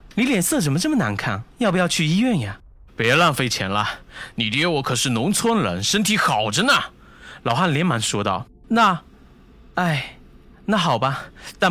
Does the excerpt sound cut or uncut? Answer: uncut